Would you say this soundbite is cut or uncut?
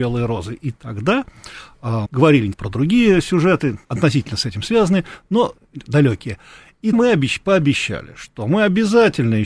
cut